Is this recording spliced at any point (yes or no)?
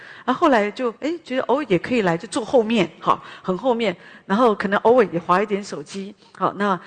yes